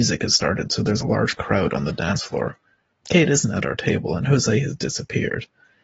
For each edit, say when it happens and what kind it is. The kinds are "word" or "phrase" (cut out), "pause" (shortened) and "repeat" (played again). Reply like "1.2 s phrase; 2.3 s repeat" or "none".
none